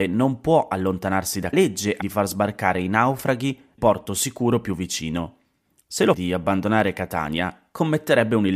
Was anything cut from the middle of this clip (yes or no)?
yes